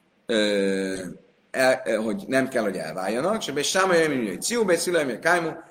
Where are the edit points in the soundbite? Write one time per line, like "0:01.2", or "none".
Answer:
none